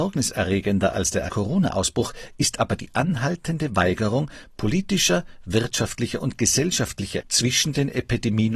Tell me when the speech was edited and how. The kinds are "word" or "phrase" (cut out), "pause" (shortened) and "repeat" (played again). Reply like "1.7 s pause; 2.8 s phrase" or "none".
1.3 s word; 7.2 s word